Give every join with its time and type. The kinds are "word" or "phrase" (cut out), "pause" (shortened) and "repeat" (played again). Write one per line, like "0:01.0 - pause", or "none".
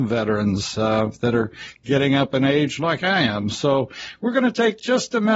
none